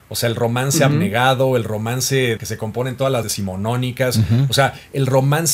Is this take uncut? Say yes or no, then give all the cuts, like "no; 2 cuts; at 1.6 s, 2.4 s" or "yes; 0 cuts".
no; 2 cuts; at 2.4 s, 3.2 s